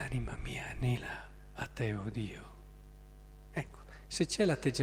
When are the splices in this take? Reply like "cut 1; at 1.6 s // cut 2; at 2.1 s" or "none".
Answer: none